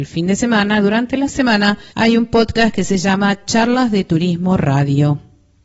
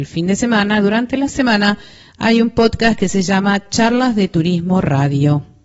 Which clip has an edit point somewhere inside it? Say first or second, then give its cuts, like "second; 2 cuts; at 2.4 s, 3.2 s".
first; 1 cut; at 1.9 s